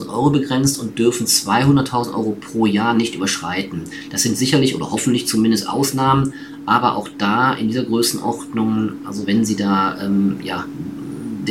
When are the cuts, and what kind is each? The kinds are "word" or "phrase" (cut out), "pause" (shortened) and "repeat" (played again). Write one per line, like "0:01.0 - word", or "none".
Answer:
none